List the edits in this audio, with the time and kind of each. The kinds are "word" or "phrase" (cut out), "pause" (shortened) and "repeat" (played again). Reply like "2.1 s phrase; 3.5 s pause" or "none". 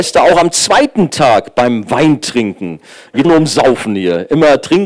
3.2 s word